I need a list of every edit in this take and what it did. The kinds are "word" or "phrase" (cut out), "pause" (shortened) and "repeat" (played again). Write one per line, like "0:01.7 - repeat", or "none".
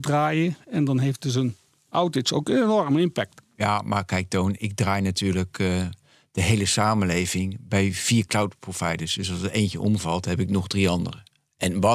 none